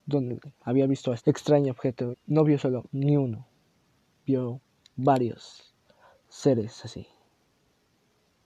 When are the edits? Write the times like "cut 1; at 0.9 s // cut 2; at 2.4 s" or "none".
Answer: cut 1; at 1.2 s // cut 2; at 2.1 s